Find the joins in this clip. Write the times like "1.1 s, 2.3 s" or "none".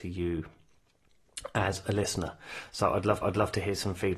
3.2 s